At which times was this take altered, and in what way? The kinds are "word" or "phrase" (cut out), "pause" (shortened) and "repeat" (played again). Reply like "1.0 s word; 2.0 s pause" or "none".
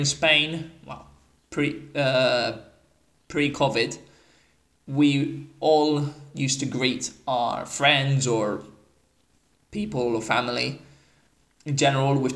none